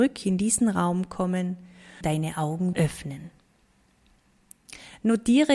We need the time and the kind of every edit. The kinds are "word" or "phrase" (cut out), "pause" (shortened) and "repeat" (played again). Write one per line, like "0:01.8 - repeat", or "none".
0:02.0 - word
0:02.7 - word